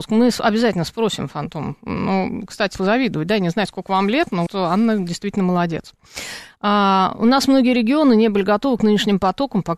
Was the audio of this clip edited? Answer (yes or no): yes